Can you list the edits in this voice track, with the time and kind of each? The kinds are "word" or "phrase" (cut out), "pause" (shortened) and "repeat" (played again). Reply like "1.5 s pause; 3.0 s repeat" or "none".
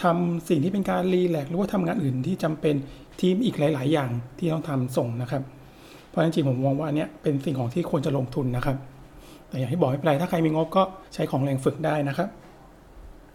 11.1 s pause